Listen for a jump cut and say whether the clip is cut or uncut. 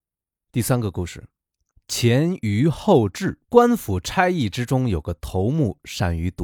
cut